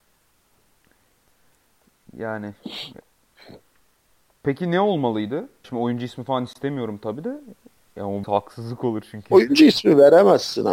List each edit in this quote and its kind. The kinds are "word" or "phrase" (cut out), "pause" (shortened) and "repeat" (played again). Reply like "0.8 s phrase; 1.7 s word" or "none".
5.6 s word; 8.2 s word